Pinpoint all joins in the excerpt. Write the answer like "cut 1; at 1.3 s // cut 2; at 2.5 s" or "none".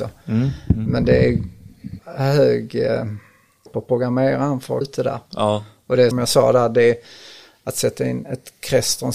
cut 1; at 2.0 s // cut 2; at 3.7 s // cut 3; at 4.8 s // cut 4; at 6.1 s

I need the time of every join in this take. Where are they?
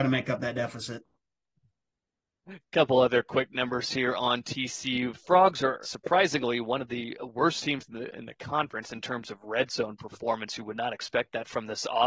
cut 1; at 5.8 s

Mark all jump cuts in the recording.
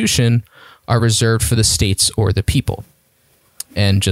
none

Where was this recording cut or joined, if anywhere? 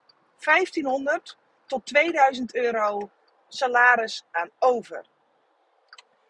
none

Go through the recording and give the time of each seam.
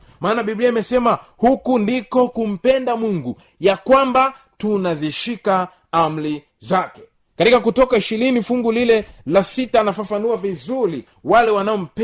none

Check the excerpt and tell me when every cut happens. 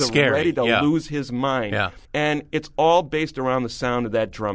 cut 1; at 2.0 s

